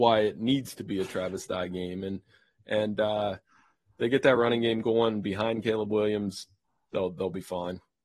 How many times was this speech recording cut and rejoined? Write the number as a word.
zero